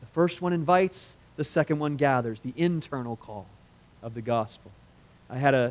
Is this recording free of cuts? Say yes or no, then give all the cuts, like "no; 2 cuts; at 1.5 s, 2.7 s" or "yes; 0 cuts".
yes; 0 cuts